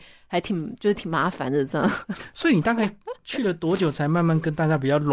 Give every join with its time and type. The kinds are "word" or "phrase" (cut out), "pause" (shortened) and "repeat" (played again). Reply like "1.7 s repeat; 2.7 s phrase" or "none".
none